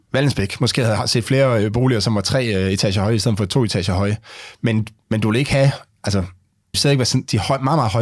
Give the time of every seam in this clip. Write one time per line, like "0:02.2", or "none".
0:06.7